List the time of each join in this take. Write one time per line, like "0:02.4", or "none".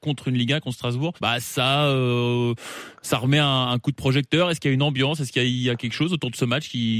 0:01.2